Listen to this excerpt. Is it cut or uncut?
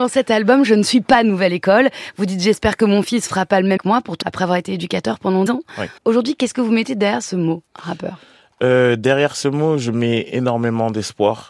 cut